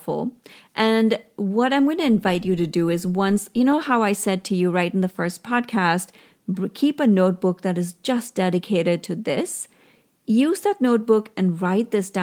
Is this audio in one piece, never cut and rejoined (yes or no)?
yes